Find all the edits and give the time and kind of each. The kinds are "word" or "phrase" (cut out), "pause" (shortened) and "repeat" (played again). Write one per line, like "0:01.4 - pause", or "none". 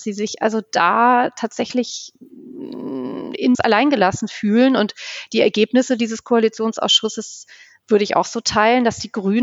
0:03.5 - phrase